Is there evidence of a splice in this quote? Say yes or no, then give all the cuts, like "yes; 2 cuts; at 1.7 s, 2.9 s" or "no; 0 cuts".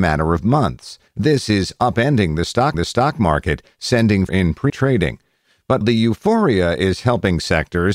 yes; 5 cuts; at 1.1 s, 2.7 s, 4.3 s, 4.7 s, 5.8 s